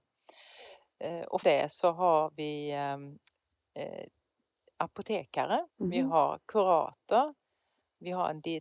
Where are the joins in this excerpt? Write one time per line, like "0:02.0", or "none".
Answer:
0:01.4
0:05.7